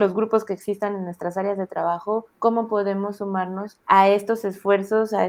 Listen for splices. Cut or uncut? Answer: cut